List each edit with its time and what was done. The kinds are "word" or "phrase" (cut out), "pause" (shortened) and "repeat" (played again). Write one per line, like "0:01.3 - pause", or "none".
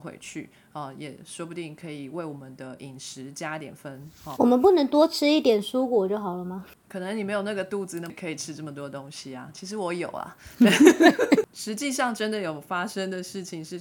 0:04.4 - word

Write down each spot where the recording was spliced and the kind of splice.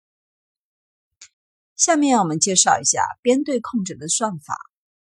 0:01.3 - pause

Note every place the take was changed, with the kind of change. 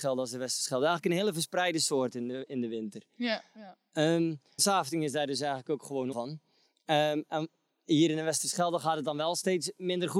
0:04.6 - word
0:06.1 - word

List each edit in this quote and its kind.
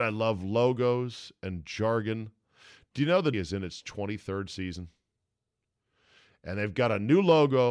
0:03.3 - word

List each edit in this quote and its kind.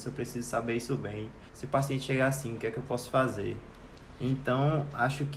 0:01.5 - pause

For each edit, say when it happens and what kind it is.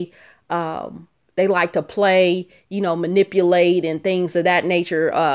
none

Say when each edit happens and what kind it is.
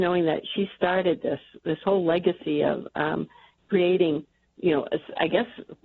none

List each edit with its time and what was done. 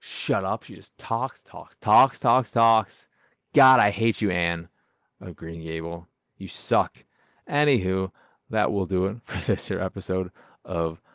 none

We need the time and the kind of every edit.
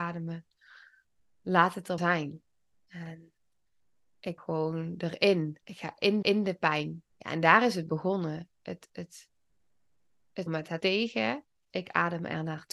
0:02.0 - word
0:04.4 - word
0:05.6 - pause
0:06.2 - repeat
0:07.1 - pause
0:10.5 - word
0:10.8 - word
0:11.7 - word

